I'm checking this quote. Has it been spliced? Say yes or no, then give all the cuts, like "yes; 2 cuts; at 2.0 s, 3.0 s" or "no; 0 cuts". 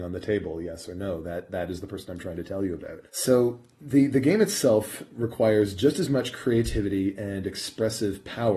yes; 1 cut; at 3.1 s